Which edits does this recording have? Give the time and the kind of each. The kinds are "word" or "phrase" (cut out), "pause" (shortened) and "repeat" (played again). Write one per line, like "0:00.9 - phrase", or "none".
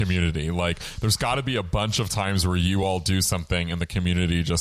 none